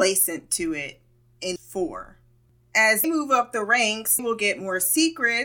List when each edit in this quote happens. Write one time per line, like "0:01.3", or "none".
0:01.6
0:03.0
0:04.2